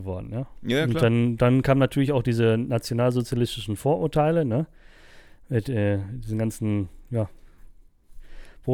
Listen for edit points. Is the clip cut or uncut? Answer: uncut